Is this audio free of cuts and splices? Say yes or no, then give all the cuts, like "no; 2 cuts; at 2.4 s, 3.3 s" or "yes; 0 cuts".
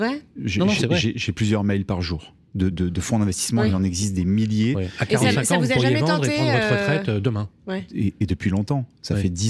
no; 1 cut; at 2.7 s